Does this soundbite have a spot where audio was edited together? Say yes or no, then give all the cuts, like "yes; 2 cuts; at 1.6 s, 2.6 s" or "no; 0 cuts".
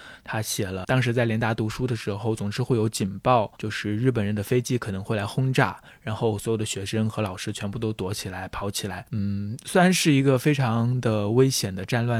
yes; 1 cut; at 3.6 s